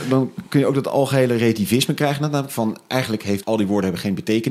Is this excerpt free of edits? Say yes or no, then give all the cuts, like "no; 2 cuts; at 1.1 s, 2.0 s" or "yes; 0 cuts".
no; 1 cut; at 3.4 s